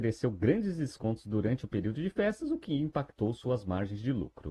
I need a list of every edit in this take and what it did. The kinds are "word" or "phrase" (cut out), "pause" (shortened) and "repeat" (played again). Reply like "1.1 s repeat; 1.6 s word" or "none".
none